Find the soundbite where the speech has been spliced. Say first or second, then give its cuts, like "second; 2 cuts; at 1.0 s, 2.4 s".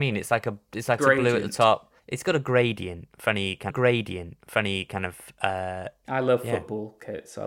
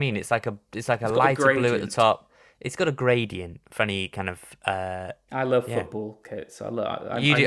first; 3 cuts; at 1.0 s, 2.0 s, 3.7 s